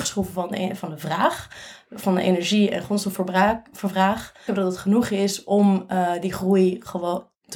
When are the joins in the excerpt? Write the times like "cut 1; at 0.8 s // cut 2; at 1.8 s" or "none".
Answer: cut 1; at 4.5 s

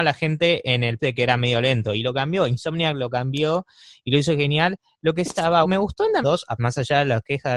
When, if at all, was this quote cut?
cut 1; at 1.0 s // cut 2; at 5.3 s // cut 3; at 5.6 s // cut 4; at 6.2 s // cut 5; at 6.6 s

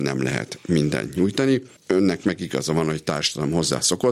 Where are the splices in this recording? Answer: cut 1; at 1.8 s

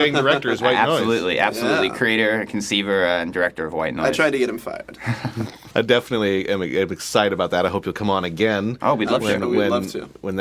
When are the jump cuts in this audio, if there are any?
none

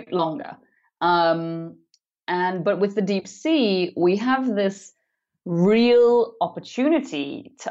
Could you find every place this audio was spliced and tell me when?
none

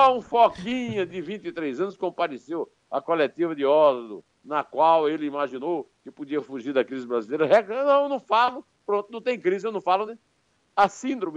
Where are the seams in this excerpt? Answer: cut 1; at 4.3 s // cut 2; at 10.1 s

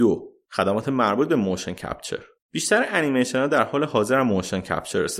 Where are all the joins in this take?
cut 1; at 2.4 s

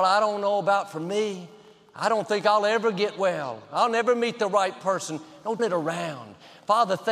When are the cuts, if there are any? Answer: cut 1; at 5.6 s

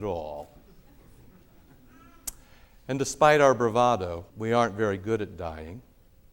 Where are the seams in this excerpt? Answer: cut 1; at 4.3 s

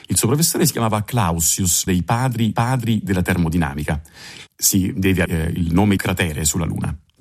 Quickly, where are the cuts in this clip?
cut 1; at 1.9 s // cut 2; at 2.5 s // cut 3; at 4.5 s // cut 4; at 5.3 s // cut 5; at 6.0 s

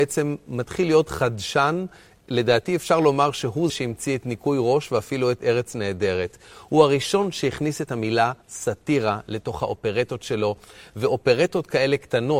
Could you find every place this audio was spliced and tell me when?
cut 1; at 3.7 s // cut 2; at 8.4 s

